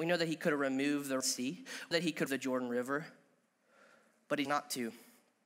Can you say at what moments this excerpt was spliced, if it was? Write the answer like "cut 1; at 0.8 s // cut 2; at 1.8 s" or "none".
cut 1; at 1.2 s // cut 2; at 1.9 s // cut 3; at 2.3 s // cut 4; at 4.4 s